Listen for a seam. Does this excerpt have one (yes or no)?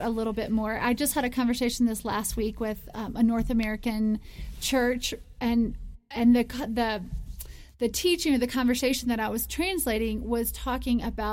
no